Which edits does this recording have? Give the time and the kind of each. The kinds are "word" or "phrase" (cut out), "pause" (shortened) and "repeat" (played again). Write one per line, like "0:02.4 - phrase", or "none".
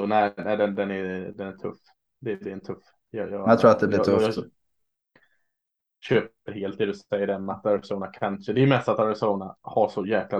none